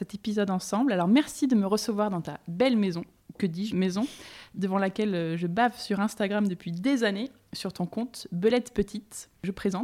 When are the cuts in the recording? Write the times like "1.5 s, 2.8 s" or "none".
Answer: 3.7 s